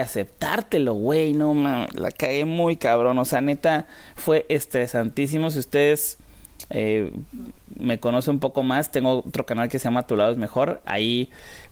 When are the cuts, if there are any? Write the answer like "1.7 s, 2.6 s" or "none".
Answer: none